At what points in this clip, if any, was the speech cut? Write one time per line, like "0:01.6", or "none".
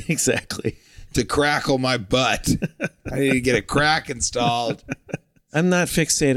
none